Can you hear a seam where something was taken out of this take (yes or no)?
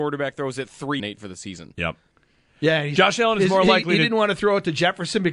yes